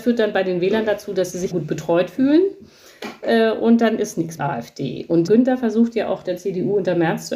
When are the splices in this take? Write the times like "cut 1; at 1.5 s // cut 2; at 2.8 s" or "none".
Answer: cut 1; at 1.5 s // cut 2; at 4.4 s // cut 3; at 5.3 s